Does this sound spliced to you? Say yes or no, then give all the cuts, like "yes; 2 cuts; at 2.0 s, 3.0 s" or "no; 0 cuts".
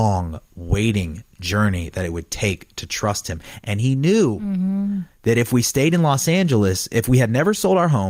no; 0 cuts